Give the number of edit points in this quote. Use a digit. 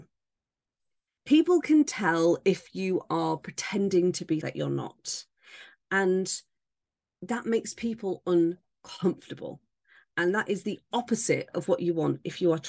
1